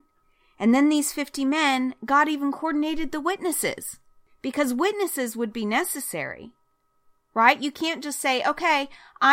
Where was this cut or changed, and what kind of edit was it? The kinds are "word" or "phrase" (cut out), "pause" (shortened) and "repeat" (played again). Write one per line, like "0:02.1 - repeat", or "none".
none